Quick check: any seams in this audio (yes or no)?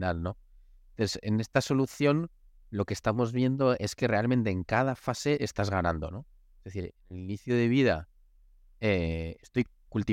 no